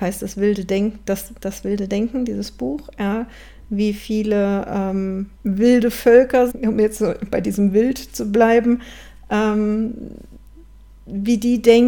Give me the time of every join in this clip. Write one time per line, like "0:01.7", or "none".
0:05.4
0:06.5